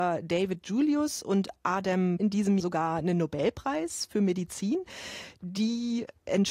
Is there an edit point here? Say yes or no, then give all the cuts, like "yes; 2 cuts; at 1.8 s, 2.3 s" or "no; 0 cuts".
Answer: yes; 2 cuts; at 2.2 s, 2.6 s